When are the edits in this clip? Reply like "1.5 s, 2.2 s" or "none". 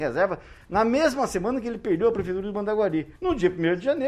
3.2 s